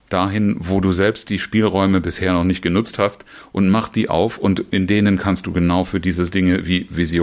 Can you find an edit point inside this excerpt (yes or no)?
no